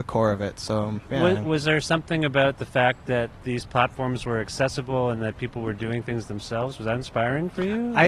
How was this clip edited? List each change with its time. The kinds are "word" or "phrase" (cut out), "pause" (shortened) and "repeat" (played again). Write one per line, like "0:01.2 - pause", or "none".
0:01.0 - word